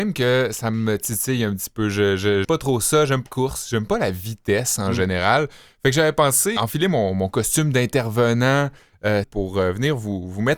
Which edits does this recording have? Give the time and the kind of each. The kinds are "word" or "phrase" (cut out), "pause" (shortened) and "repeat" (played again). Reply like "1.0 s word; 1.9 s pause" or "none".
2.4 s word; 3.3 s word; 6.6 s word; 9.2 s word